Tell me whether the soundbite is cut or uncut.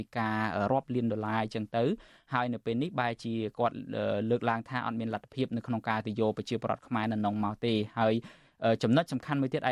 uncut